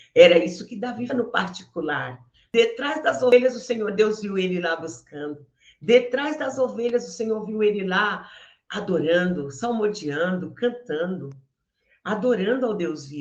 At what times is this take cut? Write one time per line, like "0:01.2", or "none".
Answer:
0:01.1